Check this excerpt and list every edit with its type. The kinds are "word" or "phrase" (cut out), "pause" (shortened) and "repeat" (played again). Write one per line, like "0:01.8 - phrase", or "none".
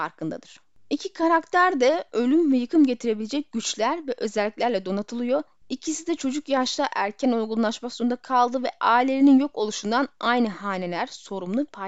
none